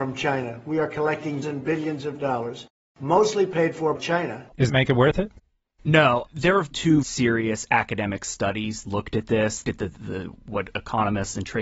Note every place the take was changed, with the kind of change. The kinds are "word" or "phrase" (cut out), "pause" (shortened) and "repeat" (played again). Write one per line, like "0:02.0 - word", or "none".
0:01.4 - word
0:03.9 - word
0:04.7 - word
0:06.3 - word
0:06.7 - word
0:07.0 - word
0:08.8 - word
0:09.6 - word